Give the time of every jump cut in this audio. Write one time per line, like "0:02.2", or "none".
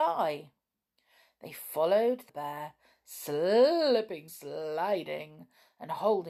0:02.3
0:04.3